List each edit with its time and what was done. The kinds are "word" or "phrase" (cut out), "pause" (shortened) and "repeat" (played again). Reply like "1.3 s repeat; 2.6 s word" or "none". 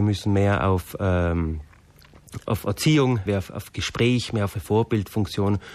2.4 s word; 3.3 s word; 4.5 s word